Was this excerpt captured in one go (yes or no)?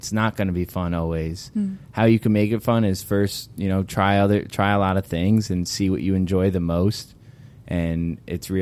yes